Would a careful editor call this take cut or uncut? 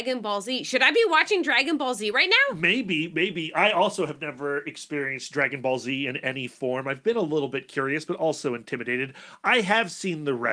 uncut